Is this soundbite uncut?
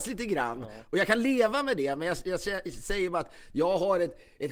yes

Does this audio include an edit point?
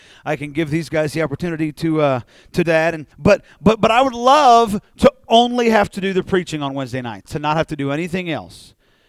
yes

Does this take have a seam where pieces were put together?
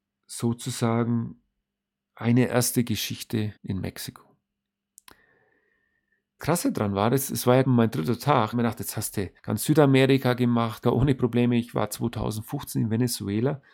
yes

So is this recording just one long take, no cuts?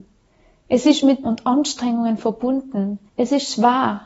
no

